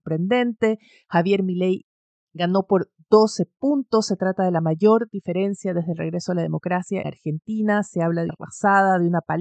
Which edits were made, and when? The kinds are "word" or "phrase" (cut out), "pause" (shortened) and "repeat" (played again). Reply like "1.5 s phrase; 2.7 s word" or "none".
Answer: 7.0 s word; 8.3 s word